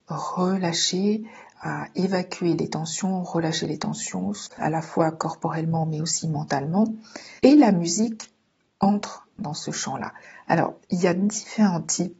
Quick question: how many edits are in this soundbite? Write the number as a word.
five